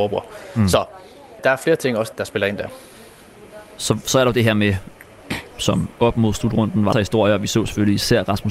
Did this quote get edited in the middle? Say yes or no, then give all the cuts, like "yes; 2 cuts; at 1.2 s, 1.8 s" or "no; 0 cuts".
yes; 4 cuts; at 1.4 s, 2.1 s, 5.5 s, 6.9 s